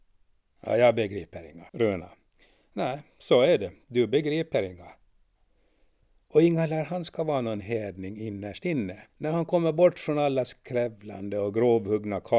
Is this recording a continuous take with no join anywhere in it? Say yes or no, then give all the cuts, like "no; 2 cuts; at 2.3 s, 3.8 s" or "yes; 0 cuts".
no; 2 cuts; at 1.7 s, 9.1 s